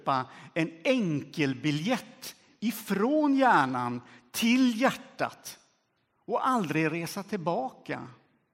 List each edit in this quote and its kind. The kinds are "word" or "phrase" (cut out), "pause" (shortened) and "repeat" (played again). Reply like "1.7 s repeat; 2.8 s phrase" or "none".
none